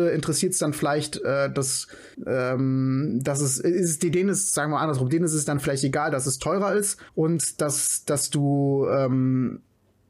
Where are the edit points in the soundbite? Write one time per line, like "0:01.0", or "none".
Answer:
0:02.1
0:07.1